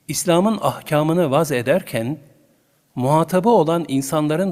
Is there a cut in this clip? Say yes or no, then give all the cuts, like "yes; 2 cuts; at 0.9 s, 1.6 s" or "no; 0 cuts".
no; 0 cuts